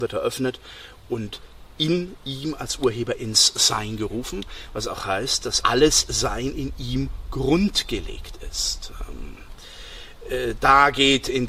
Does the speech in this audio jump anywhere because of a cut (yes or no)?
yes